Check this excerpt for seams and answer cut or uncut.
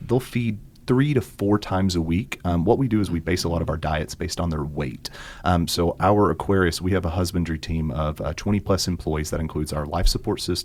uncut